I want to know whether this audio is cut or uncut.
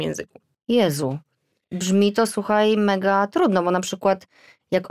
uncut